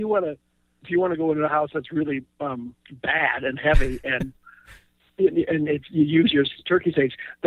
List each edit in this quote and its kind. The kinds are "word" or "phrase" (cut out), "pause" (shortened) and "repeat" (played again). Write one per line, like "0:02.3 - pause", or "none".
0:02.8 - pause